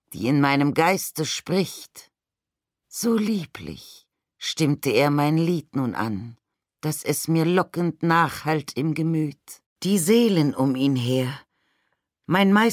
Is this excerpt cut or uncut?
cut